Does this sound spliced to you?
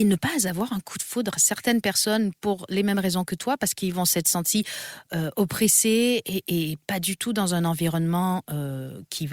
no; 0 cuts

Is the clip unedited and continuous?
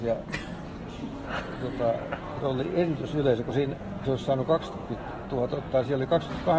no; 3 cuts; at 2.4 s, 4.0 s, 5.5 s

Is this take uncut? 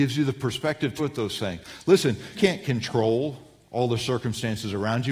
no; 2 cuts; at 1.0 s, 2.3 s

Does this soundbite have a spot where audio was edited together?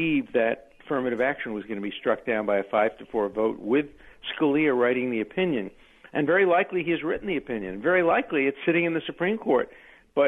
no; 0 cuts

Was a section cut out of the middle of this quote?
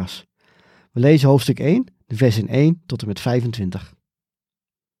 no; 0 cuts

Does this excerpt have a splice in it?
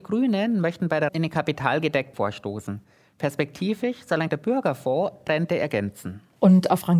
yes; 4 cuts; at 1.1 s, 2.1 s, 4.3 s, 5.3 s

